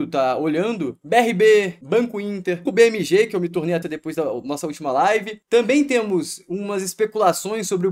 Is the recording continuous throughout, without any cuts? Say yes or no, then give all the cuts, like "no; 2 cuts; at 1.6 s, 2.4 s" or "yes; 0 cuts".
no; 2 cuts; at 2.7 s, 3.8 s